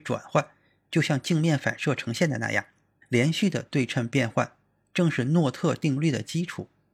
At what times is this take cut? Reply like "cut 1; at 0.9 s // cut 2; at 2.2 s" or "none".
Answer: none